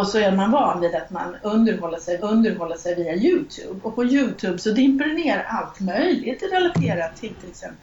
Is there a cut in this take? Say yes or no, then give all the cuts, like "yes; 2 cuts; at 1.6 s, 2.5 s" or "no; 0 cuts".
yes; 1 cut; at 2.2 s